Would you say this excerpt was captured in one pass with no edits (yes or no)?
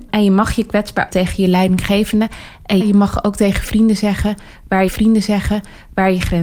no